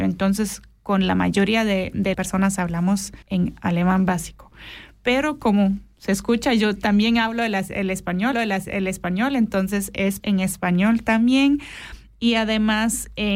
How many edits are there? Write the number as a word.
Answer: four